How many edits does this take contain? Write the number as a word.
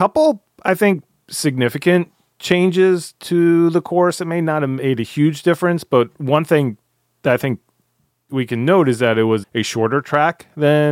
two